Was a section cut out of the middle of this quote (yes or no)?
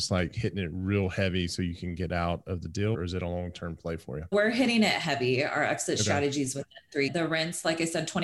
yes